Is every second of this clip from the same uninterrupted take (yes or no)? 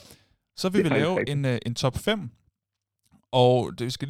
yes